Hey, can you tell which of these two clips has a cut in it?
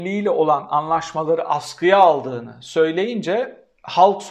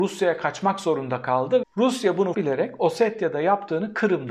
second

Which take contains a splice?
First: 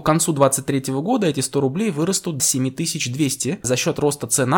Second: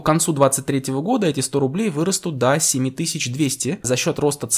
first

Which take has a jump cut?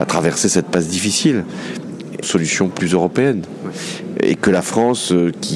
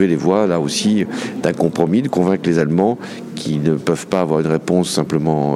first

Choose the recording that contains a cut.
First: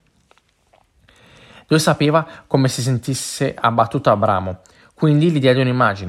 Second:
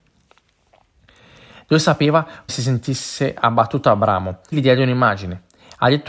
second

